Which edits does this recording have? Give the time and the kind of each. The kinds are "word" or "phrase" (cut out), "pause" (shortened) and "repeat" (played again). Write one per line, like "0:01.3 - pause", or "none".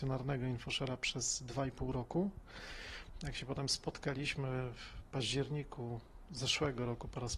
none